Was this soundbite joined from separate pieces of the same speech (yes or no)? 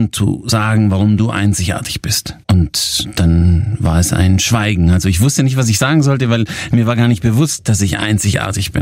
yes